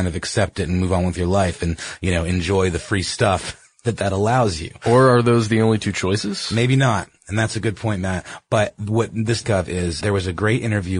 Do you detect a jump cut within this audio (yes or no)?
yes